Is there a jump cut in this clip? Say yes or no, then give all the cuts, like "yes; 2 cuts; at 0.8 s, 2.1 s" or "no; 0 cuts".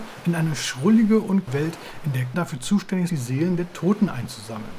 yes; 3 cuts; at 1.5 s, 2.3 s, 3.1 s